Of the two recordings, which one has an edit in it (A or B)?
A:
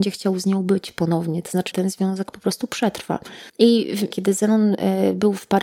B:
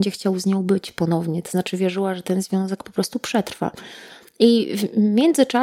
A